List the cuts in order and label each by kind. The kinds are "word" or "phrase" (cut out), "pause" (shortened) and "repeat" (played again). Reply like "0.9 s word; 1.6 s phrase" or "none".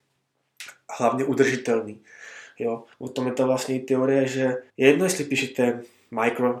2.9 s pause; 4.7 s pause